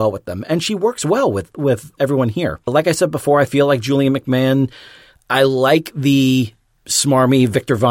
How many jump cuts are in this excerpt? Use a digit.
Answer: 0